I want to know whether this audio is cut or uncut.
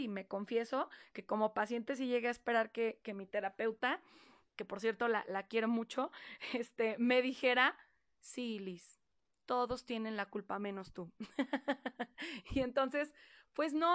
uncut